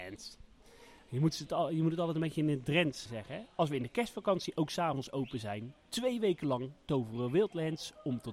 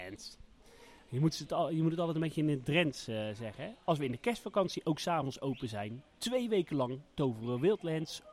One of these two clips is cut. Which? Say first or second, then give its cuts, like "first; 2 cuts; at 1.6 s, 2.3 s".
first; 1 cut; at 3.1 s